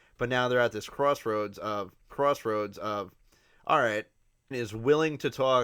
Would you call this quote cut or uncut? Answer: cut